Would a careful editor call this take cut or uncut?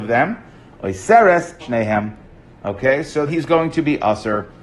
cut